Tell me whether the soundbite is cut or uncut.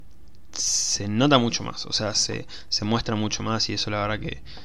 uncut